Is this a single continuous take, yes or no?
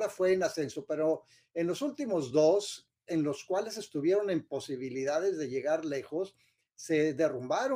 yes